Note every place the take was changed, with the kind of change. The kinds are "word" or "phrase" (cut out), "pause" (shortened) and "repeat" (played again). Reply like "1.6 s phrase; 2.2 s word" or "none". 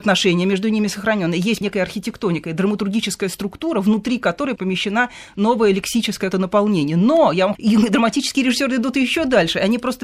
1.6 s word; 6.3 s word; 7.5 s phrase

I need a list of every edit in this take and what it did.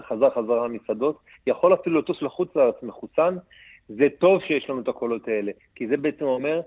none

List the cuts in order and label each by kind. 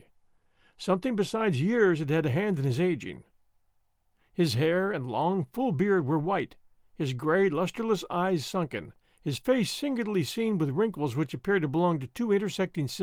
9.0 s pause

